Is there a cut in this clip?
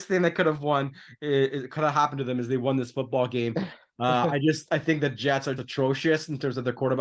yes; 1 cut; at 5.6 s

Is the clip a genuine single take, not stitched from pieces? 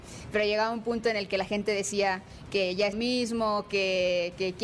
no; 1 cut; at 2.9 s

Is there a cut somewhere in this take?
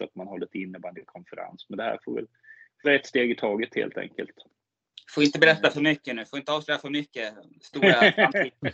yes; 1 cut; at 2.8 s

